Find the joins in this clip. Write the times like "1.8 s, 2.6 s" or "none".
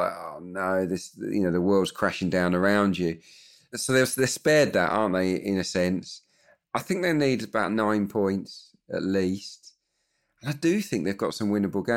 none